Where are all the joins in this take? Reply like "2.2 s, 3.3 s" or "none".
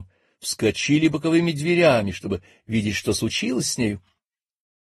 none